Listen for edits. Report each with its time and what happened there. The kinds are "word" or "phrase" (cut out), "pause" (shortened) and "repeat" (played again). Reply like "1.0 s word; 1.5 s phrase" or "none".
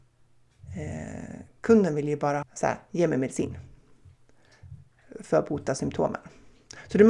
2.4 s word

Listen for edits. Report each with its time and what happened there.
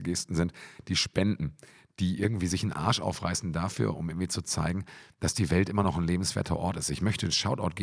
none

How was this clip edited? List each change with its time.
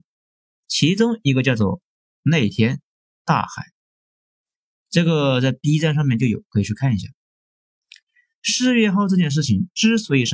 none

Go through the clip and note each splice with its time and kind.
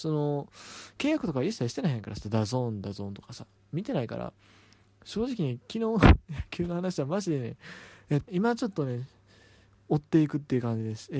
8.3 s word

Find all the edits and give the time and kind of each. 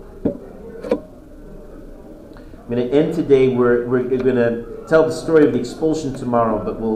none

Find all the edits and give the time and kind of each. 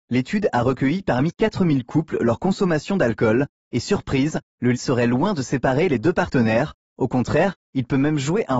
4.7 s word

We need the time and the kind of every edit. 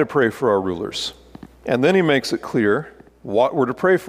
1.5 s pause; 3.1 s pause

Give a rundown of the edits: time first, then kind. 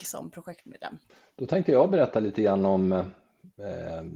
none

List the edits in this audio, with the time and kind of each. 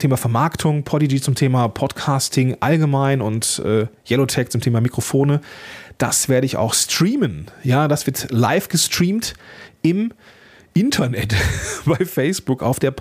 none

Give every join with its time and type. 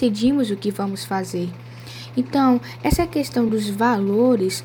none

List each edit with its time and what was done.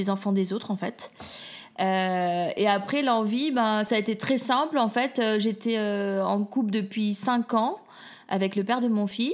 none

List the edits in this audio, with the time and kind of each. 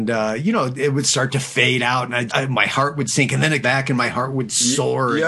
2.3 s word; 3.6 s word

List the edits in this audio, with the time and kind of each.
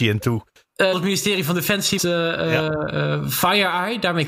0.9 s word; 2.0 s word

